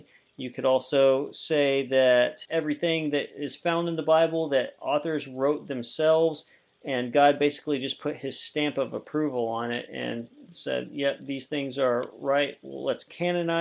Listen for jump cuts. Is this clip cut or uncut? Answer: uncut